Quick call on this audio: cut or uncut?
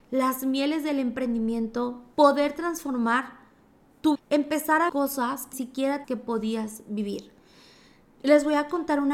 cut